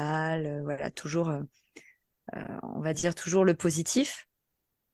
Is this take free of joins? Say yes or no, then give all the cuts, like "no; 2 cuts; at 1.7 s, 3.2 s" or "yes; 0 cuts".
yes; 0 cuts